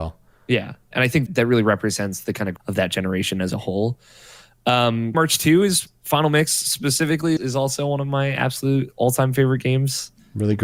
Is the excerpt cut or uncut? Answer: cut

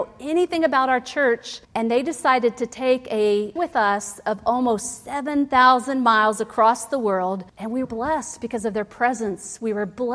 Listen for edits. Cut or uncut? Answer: cut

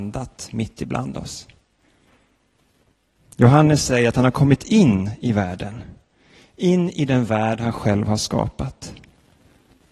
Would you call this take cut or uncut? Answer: uncut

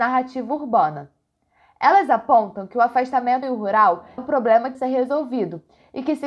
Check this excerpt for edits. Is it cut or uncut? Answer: cut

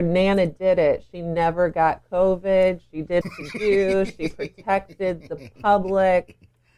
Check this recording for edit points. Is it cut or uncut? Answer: cut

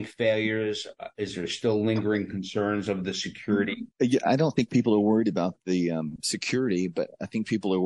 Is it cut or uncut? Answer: cut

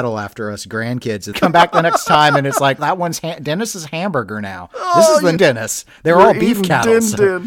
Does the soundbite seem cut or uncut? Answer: cut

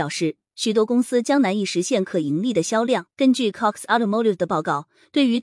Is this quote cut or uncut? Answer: cut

